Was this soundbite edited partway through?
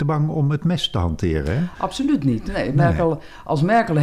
no; 0 cuts

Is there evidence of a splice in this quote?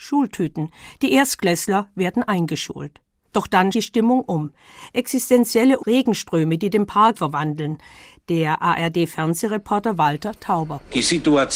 yes; 4 cuts; at 3.2 s, 3.7 s, 5.8 s, 7.1 s

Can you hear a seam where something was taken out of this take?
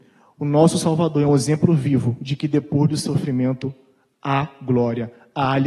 no; 0 cuts

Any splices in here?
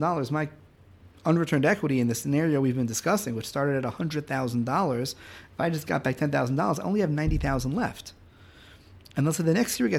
no; 0 cuts

